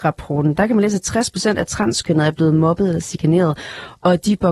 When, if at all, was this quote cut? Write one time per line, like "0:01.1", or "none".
none